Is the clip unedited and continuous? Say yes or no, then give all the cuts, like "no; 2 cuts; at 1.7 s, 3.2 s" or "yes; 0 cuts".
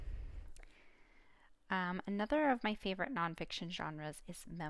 yes; 0 cuts